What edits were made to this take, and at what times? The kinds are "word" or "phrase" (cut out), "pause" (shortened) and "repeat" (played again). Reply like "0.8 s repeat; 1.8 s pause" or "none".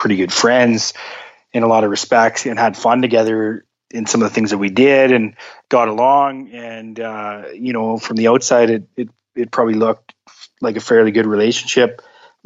none